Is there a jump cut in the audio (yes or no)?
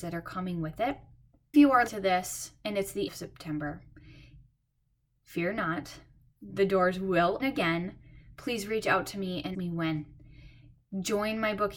yes